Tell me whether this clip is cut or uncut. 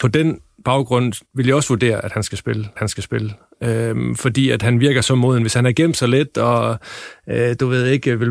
cut